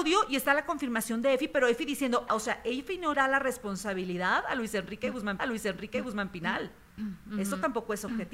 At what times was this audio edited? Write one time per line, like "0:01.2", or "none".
0:02.3
0:03.1
0:05.4

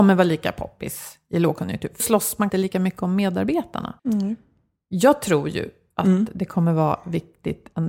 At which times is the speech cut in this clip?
0:02.0
0:02.5
0:04.0

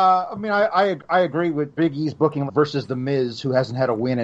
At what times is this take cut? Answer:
0:01.7
0:02.5

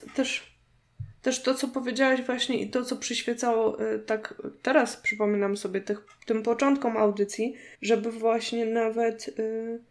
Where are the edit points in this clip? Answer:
0:07.7

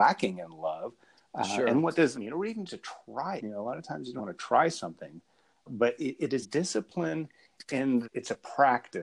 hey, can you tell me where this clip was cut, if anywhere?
0:02.1
0:02.7
0:03.4
0:04.2
0:05.7
0:06.4
0:08.0

